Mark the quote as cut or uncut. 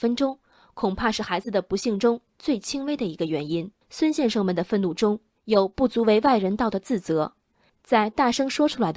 cut